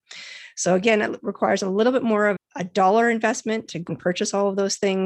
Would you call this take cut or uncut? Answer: cut